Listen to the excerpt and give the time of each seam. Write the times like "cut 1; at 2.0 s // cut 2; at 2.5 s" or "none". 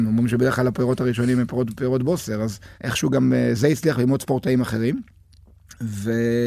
cut 1; at 2.7 s